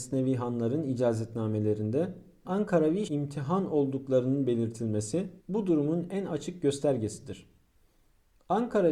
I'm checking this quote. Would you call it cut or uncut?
cut